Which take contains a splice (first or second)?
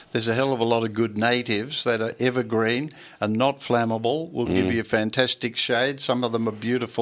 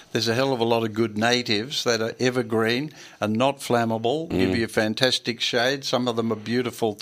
second